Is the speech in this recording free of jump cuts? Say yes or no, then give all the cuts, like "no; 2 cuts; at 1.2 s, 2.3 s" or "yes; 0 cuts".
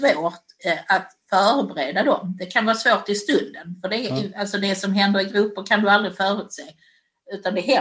yes; 0 cuts